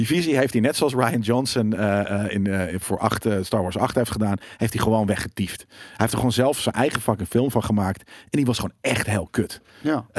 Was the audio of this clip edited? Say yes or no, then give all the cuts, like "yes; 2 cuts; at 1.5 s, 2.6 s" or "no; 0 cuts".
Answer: yes; 2 cuts; at 2.3 s, 2.8 s